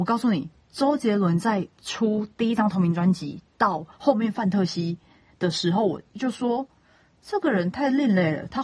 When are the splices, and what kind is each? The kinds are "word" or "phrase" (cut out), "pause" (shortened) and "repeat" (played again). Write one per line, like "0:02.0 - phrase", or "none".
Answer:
0:03.9 - pause